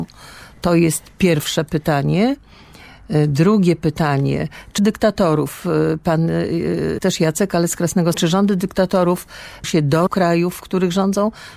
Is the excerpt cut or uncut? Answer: cut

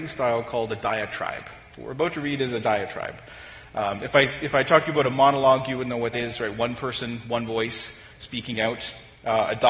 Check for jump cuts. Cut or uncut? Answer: cut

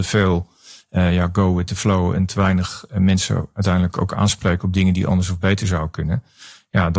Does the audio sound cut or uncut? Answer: uncut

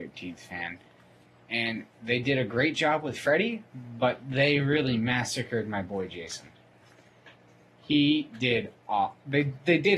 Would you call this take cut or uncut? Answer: uncut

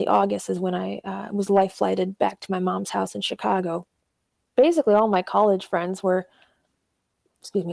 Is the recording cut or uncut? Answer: uncut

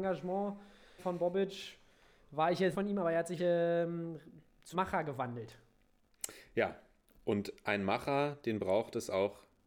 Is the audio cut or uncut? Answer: cut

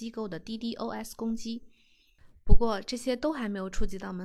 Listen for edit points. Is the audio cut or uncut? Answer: uncut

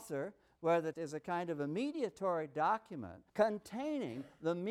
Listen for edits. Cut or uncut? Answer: cut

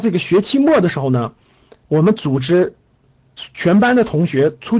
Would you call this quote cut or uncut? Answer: uncut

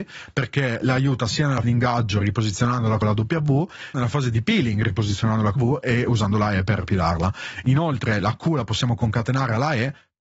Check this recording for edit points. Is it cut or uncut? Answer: cut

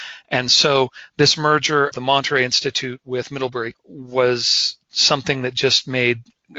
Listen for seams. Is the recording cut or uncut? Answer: cut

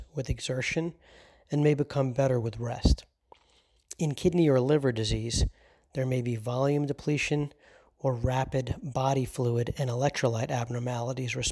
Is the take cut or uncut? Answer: uncut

